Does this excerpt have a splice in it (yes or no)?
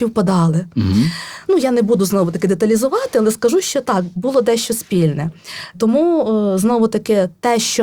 no